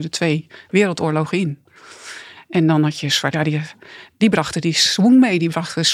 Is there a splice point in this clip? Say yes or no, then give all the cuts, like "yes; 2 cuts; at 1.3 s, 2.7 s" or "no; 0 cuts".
yes; 1 cut; at 3.3 s